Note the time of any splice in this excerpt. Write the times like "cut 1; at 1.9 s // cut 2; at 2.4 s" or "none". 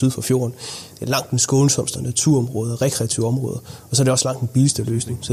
cut 1; at 2.0 s